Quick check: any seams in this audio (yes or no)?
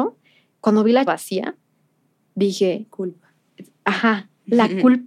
yes